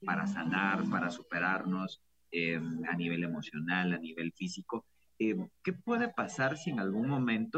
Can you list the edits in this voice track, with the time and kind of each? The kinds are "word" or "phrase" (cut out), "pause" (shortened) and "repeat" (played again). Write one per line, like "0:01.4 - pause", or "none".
none